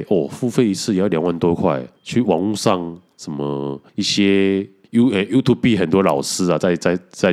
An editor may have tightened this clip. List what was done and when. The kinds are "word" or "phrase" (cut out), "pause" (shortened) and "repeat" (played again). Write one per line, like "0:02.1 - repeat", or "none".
0:02.0 - pause
0:03.9 - pause
0:04.8 - pause